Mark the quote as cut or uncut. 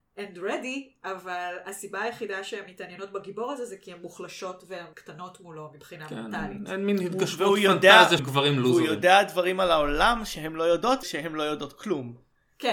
cut